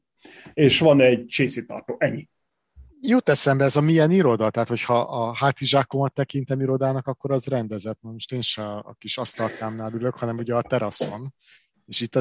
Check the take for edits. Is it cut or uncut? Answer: cut